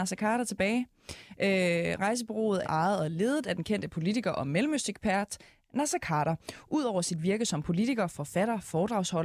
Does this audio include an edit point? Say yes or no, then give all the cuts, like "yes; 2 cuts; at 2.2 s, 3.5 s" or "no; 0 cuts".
yes; 1 cut; at 2.6 s